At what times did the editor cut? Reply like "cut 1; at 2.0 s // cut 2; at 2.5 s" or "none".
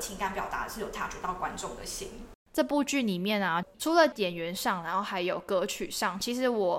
cut 1; at 2.4 s